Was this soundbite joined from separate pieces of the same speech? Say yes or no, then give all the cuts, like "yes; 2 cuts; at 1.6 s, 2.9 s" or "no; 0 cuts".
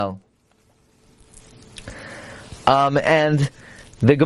no; 0 cuts